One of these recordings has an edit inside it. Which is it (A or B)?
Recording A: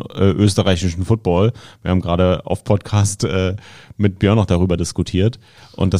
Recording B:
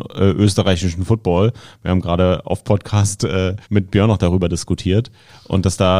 B